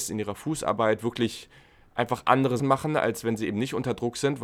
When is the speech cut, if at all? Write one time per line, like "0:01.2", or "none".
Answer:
0:02.6

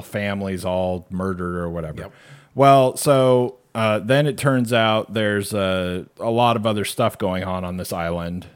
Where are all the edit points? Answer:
0:06.1

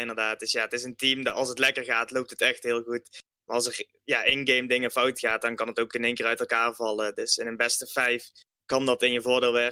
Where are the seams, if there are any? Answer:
none

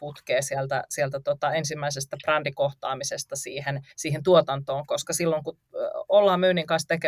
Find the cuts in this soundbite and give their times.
0:03.9

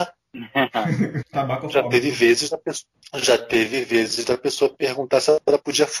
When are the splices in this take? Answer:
0:01.2

